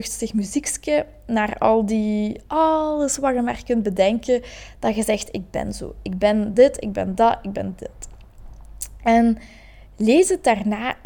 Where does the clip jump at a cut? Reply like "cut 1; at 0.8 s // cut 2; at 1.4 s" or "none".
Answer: none

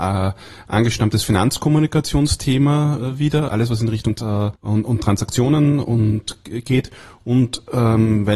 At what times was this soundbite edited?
cut 1; at 3.5 s // cut 2; at 4.1 s // cut 3; at 4.6 s

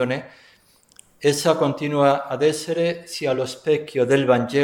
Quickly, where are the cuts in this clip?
none

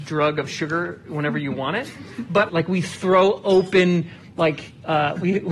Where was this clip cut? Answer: cut 1; at 2.5 s

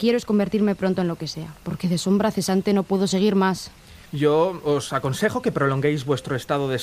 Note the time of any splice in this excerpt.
cut 1; at 4.1 s

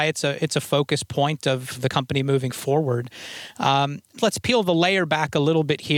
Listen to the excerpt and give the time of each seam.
none

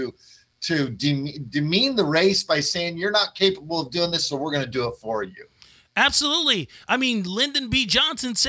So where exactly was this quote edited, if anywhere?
none

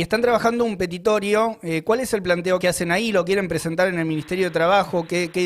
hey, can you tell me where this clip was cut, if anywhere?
cut 1; at 2.6 s

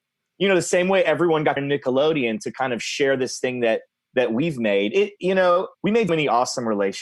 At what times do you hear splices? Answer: cut 1; at 1.6 s // cut 2; at 3.9 s // cut 3; at 5.7 s // cut 4; at 6.1 s

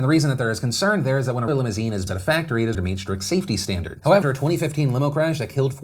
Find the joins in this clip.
cut 1; at 1.5 s // cut 2; at 2.1 s // cut 3; at 2.7 s // cut 4; at 4.2 s

